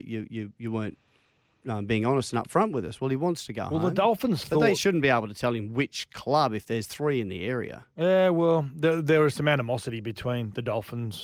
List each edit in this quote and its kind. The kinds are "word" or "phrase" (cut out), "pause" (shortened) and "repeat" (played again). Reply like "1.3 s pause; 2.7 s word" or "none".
none